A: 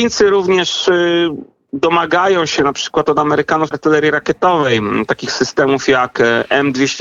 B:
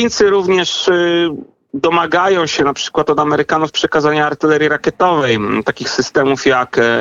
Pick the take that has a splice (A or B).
A